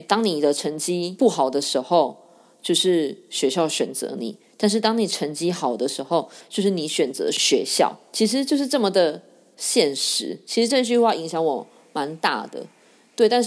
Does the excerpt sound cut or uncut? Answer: uncut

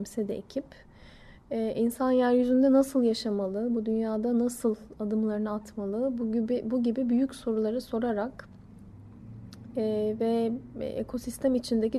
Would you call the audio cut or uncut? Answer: uncut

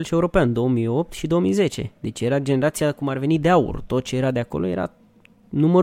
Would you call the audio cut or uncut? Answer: cut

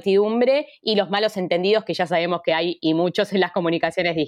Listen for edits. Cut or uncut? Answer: uncut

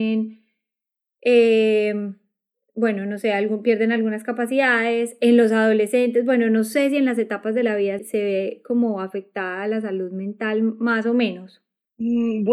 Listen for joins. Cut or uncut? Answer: cut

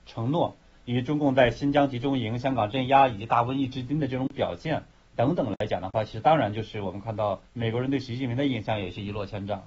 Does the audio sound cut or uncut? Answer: cut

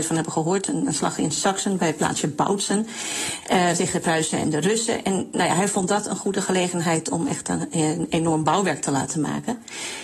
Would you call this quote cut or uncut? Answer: uncut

